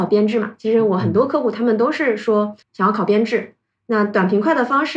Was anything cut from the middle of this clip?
yes; 1 cut; at 2.6 s

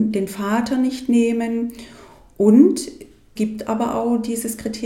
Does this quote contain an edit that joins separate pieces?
yes; 1 cut; at 3.4 s

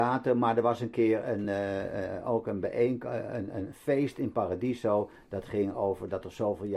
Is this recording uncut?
yes; 0 cuts

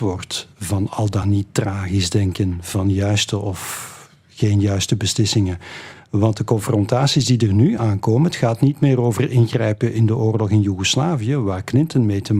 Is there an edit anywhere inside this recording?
no; 0 cuts

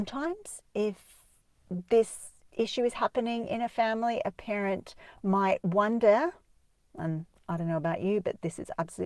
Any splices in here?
no; 0 cuts

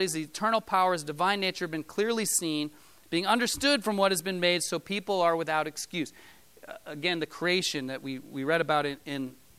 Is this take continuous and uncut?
yes; 0 cuts

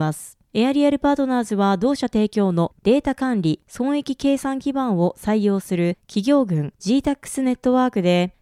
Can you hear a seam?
no; 0 cuts

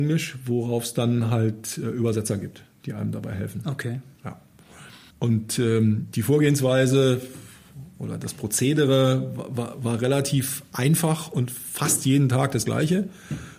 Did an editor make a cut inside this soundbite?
no; 0 cuts

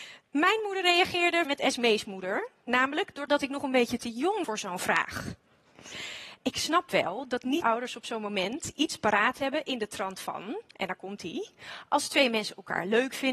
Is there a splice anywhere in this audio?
yes; 4 cuts; at 1.4 s, 3.3 s, 4.4 s, 7.6 s

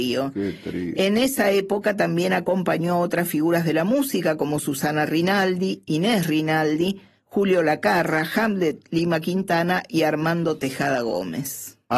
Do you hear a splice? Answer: no; 0 cuts

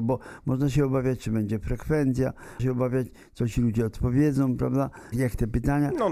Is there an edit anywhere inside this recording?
yes; 2 cuts; at 2.6 s, 5.1 s

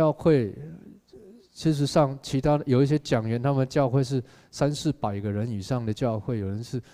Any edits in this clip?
no; 0 cuts

